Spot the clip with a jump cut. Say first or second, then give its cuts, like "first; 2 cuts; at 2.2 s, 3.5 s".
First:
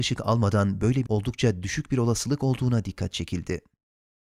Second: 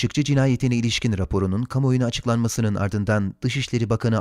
first; 1 cut; at 1.1 s